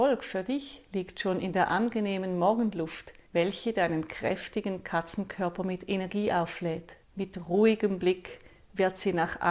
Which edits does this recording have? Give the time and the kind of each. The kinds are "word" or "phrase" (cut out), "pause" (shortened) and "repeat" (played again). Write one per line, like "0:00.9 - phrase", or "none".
0:03.3 - pause
0:07.0 - pause